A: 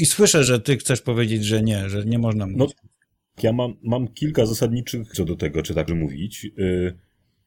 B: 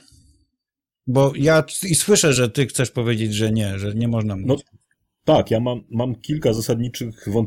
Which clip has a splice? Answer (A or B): A